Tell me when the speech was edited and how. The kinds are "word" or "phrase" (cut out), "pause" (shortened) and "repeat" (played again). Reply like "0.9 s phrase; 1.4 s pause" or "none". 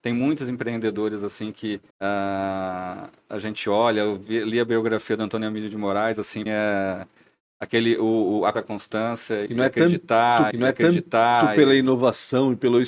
1.9 s pause; 6.5 s phrase; 8.5 s phrase; 9.5 s word; 10.5 s repeat

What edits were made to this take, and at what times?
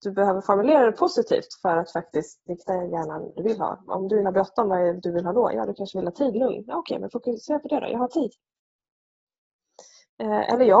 2.5 s word; 3.4 s phrase; 4.2 s phrase; 5.0 s word; 6.3 s word

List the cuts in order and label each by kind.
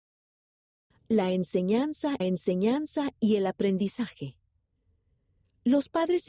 2.2 s repeat

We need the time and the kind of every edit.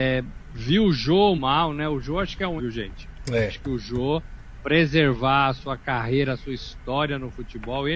1.4 s word; 2.6 s word; 4.6 s word

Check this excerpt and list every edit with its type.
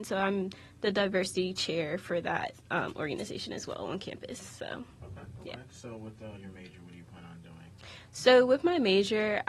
2.6 s pause

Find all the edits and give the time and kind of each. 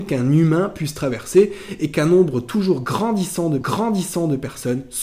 3.6 s repeat

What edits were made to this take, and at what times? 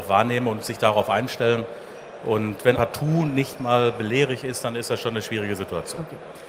2.7 s word

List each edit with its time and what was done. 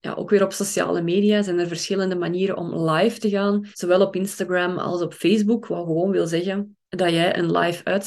3.7 s pause; 6.8 s pause

